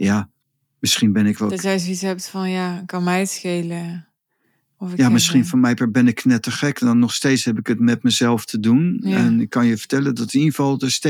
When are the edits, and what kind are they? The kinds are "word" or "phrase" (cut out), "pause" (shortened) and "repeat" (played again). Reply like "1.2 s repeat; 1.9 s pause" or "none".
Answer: none